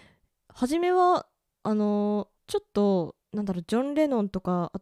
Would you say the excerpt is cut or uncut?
cut